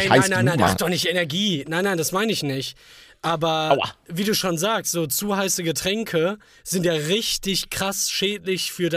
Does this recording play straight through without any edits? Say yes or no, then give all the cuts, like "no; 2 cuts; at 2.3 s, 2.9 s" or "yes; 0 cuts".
yes; 0 cuts